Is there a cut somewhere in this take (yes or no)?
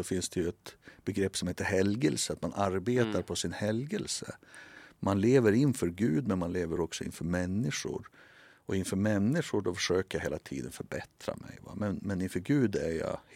no